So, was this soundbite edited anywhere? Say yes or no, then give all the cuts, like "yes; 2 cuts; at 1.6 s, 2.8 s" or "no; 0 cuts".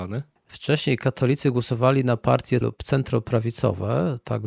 yes; 1 cut; at 2.6 s